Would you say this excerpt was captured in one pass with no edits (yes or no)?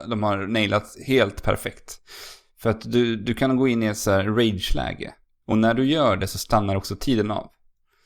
yes